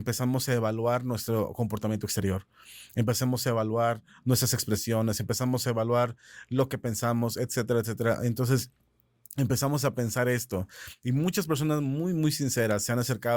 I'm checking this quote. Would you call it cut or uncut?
uncut